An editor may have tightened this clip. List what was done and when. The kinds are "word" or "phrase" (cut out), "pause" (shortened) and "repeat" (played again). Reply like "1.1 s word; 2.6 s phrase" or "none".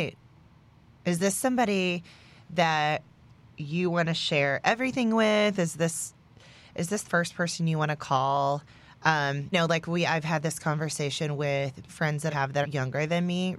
7.0 s word; 9.5 s word; 11.9 s word; 12.3 s word; 12.6 s word